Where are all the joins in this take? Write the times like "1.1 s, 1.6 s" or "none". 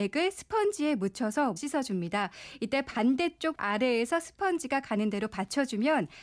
1.6 s, 3.5 s